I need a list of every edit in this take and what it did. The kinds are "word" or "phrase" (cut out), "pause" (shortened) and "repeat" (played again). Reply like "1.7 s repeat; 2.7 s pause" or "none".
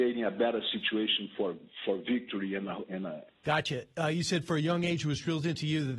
3.3 s phrase

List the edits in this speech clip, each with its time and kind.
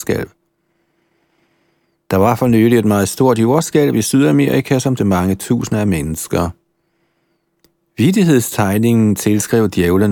5.0 s word

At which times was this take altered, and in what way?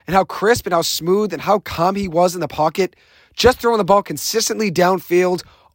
none

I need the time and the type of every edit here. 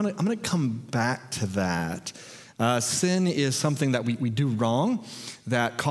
none

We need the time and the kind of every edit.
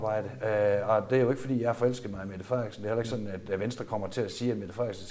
none

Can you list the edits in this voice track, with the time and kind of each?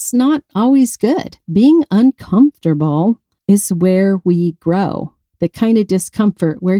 1.4 s pause; 3.4 s pause

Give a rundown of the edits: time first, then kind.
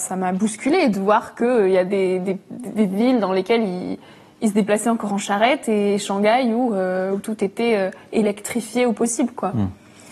none

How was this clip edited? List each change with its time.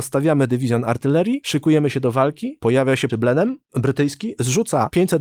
3.1 s word

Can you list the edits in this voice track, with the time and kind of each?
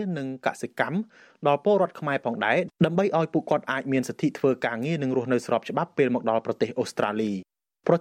none

